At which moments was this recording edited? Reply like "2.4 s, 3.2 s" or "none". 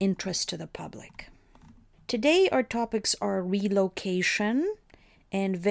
none